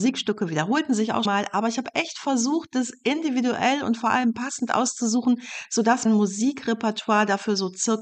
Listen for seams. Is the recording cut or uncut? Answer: cut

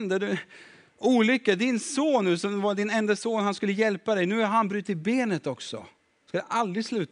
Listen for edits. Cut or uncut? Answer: uncut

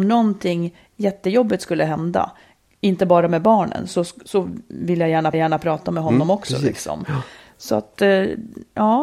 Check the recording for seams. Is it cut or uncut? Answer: cut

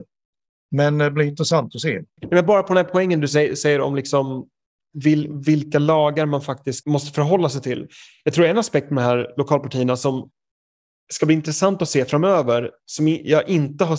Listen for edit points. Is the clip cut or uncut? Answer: uncut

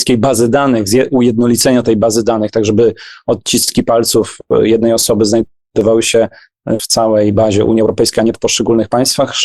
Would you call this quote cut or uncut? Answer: cut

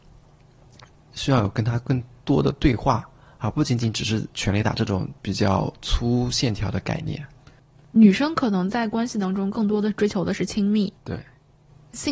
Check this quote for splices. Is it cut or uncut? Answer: cut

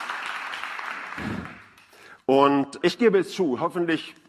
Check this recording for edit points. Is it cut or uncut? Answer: cut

